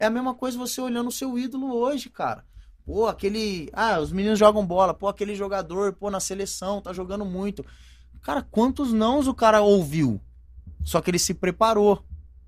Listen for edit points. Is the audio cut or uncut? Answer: uncut